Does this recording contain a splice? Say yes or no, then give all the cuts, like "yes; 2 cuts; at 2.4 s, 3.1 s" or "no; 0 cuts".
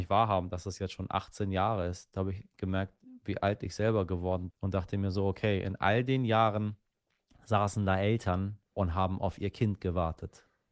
yes; 2 cuts; at 4.5 s, 8.7 s